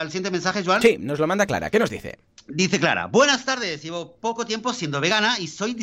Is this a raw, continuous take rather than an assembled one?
yes; 0 cuts

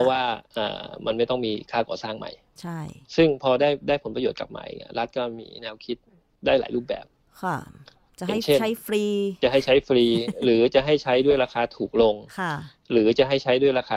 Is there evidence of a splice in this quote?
no; 0 cuts

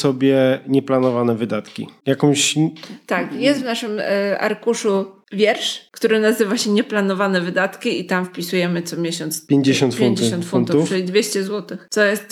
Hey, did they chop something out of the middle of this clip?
no; 0 cuts

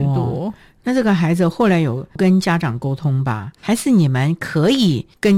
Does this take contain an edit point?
yes; 1 cut; at 3.6 s

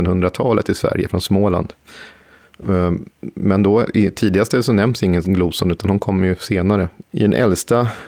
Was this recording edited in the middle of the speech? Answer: yes; 2 cuts; at 3.1 s, 7.0 s

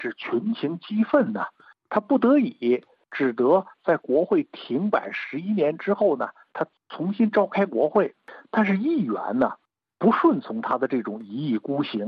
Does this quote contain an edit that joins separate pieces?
no; 0 cuts

